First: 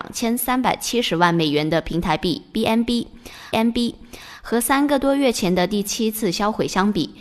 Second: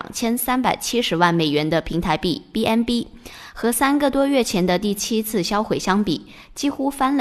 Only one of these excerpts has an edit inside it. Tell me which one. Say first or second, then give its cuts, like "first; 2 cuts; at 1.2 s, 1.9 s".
first; 1 cut; at 3.5 s